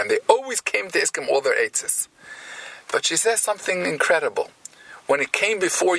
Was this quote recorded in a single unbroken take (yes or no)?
yes